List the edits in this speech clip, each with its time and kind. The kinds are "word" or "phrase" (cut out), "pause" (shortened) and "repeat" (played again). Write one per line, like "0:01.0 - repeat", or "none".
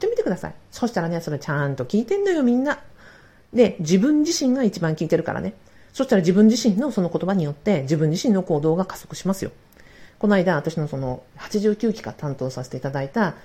none